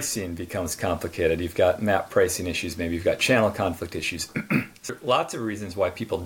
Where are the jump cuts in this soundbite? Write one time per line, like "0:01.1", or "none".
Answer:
0:04.9